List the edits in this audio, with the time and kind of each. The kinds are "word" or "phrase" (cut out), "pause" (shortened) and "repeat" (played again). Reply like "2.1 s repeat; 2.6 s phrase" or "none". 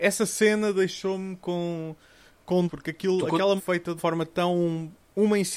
2.7 s word; 3.6 s phrase; 4.0 s word

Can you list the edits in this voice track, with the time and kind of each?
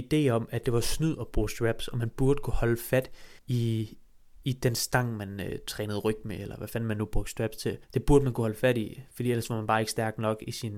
3.4 s pause; 7.8 s pause

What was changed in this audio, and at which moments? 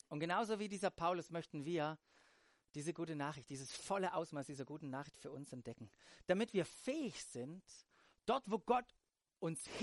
none

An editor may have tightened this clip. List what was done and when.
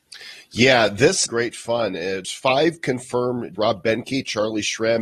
1.3 s phrase; 2.2 s word; 3.5 s word

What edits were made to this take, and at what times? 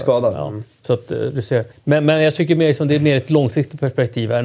1.7 s pause

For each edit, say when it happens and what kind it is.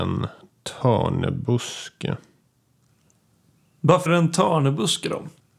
4.1 s word

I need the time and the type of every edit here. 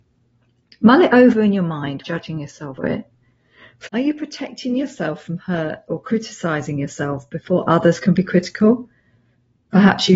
2.0 s word; 2.8 s word; 3.9 s word

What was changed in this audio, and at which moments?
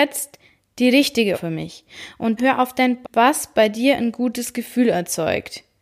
1.3 s word; 2.4 s word; 3.0 s word

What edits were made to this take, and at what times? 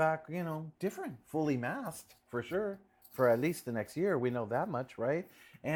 none

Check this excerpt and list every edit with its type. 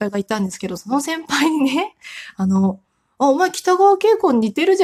none

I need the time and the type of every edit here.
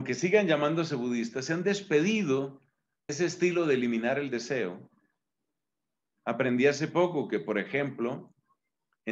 3.1 s word

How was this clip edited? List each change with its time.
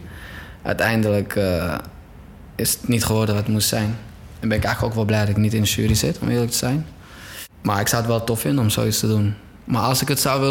none

